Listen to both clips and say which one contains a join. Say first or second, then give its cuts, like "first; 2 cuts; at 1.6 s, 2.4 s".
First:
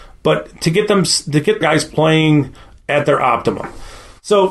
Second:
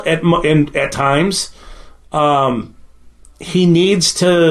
first; 1 cut; at 1.6 s